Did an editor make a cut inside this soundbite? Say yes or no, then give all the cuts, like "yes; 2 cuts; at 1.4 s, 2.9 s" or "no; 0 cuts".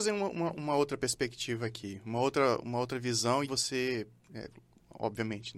yes; 1 cut; at 3.4 s